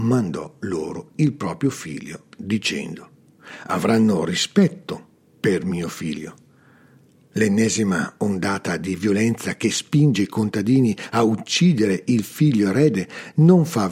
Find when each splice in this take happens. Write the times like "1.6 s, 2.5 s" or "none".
none